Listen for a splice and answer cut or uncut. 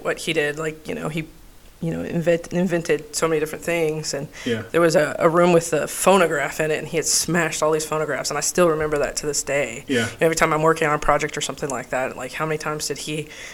uncut